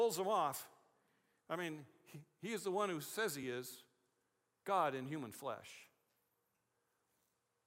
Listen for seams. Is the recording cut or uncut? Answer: uncut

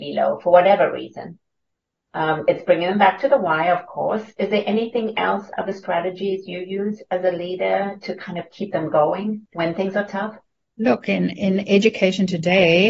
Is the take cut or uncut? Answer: uncut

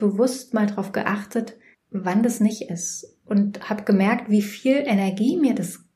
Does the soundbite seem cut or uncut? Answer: uncut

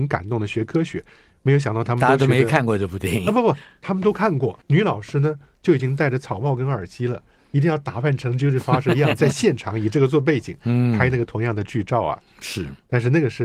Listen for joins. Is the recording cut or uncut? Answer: cut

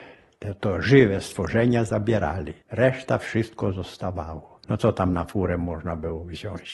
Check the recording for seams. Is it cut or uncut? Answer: cut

